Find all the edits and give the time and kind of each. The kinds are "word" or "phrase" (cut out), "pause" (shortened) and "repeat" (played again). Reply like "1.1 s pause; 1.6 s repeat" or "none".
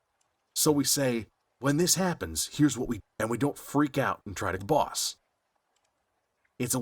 1.4 s pause; 3.0 s word; 4.6 s word